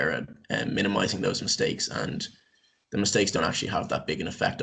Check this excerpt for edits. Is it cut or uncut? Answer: uncut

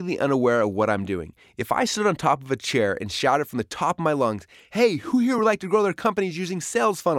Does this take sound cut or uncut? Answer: uncut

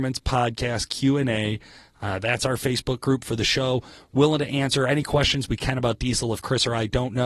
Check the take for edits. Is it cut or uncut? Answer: uncut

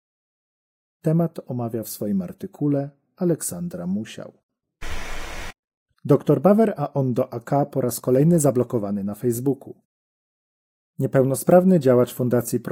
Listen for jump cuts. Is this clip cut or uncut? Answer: uncut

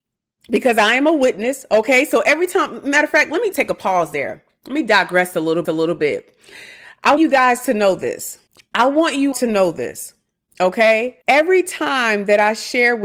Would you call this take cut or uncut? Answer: cut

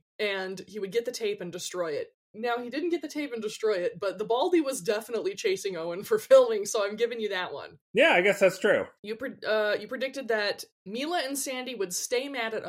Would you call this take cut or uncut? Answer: cut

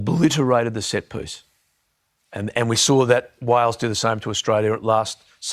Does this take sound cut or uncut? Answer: uncut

